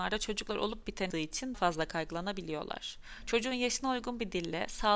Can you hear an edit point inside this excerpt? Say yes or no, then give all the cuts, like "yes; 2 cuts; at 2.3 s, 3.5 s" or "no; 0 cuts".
yes; 2 cuts; at 1.1 s, 1.5 s